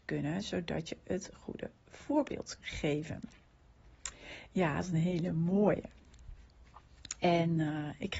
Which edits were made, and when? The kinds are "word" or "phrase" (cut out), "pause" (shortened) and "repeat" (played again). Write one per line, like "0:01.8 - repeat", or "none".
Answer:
0:02.6 - word
0:04.8 - word